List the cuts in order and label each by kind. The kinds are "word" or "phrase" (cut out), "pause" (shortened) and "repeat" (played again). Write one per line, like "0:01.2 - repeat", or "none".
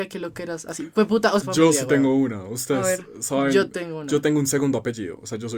0:01.4 - phrase